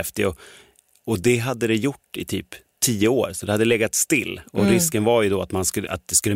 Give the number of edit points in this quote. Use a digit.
0